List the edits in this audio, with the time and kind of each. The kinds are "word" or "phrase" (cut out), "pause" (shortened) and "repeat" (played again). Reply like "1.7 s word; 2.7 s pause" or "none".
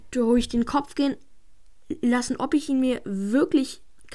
none